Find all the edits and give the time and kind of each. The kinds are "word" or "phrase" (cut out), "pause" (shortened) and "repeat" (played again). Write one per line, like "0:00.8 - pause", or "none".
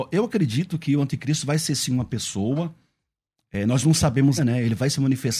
0:04.4 - word